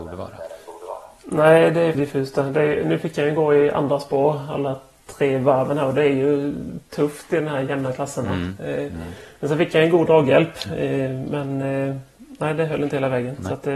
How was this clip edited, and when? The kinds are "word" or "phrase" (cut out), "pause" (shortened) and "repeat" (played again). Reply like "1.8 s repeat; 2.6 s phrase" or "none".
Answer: 1.9 s word